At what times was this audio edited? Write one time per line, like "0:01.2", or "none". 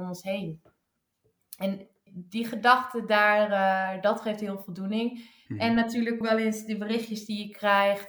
0:02.1
0:06.2